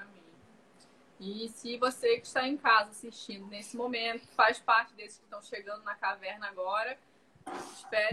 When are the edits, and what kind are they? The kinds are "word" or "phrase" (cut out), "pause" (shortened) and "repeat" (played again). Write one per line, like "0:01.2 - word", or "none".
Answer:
none